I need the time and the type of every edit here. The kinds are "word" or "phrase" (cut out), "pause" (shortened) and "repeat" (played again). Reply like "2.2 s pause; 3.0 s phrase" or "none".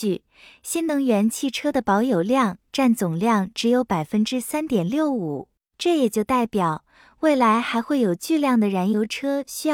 none